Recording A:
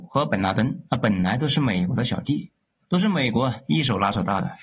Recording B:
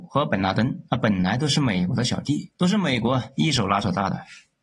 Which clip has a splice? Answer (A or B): B